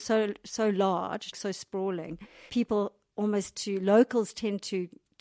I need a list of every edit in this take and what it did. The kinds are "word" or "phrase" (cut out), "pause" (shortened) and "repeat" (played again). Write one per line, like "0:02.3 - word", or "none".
0:01.3 - word
0:02.5 - word
0:03.5 - word